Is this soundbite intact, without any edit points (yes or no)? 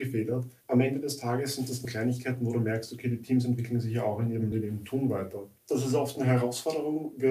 no